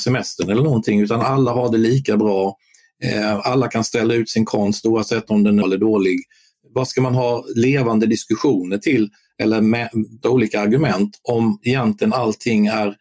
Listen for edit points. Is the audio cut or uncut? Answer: cut